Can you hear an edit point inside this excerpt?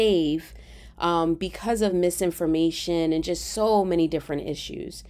no; 0 cuts

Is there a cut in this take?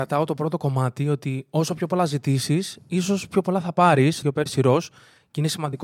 yes; 1 cut; at 4.2 s

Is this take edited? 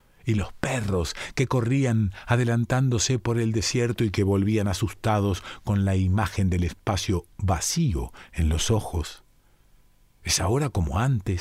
no; 0 cuts

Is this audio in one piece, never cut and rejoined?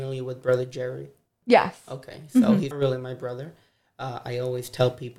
no; 1 cut; at 2.7 s

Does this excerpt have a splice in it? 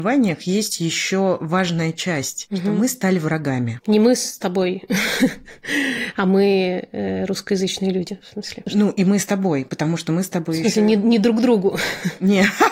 no; 0 cuts

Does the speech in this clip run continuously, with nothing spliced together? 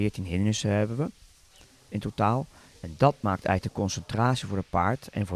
yes; 0 cuts

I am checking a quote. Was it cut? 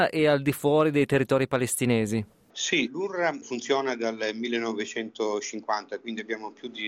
no; 0 cuts

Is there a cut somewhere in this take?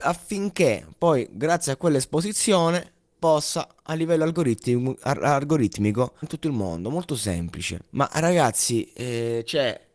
yes; 2 cuts; at 6.2 s, 7.9 s

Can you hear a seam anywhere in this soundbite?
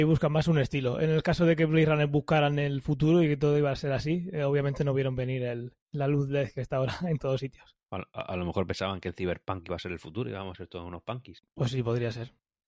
yes; 2 cuts; at 5.8 s, 7.8 s

